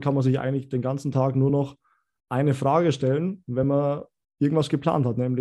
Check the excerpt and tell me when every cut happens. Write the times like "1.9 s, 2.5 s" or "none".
none